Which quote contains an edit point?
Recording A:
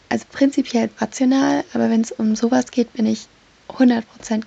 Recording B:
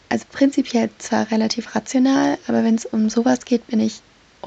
A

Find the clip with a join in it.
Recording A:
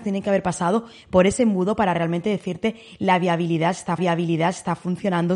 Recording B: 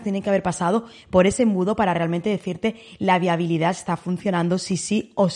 A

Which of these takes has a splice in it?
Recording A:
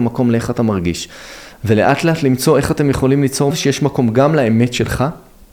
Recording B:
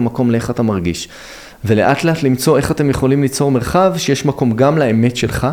A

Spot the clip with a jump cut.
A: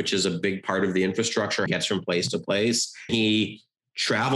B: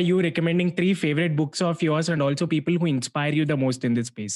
A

